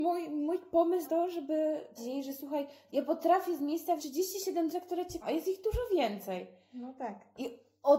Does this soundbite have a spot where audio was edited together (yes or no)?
yes